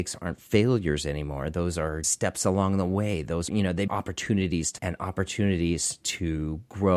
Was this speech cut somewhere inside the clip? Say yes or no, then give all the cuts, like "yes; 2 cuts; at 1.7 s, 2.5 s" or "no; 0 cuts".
yes; 4 cuts; at 2.0 s, 3.5 s, 3.9 s, 4.8 s